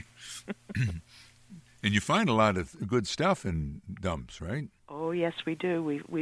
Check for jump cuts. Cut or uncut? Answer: uncut